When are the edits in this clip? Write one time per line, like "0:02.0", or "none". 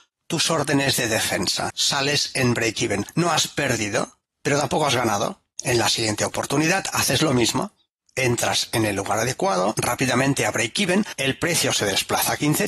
0:09.7